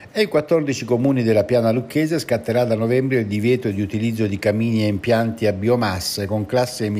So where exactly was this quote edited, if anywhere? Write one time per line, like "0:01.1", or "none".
none